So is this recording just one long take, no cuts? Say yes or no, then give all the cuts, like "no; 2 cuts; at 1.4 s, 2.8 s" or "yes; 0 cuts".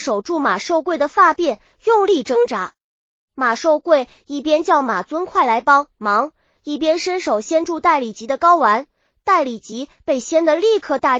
no; 1 cut; at 5.9 s